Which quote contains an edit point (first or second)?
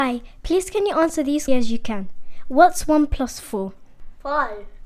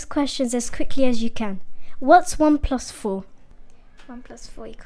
first